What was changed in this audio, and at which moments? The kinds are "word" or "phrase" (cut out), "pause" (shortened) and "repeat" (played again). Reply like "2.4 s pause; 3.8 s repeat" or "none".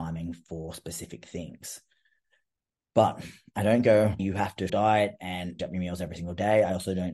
4.2 s word; 4.7 s word; 5.6 s word